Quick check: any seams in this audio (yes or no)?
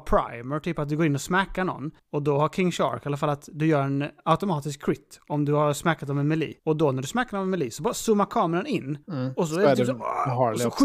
yes